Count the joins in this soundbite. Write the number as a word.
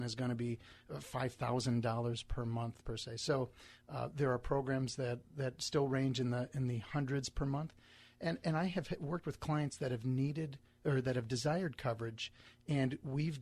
zero